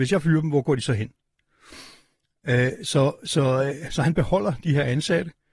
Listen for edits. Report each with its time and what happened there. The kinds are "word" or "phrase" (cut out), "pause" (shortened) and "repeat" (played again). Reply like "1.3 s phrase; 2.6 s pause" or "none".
none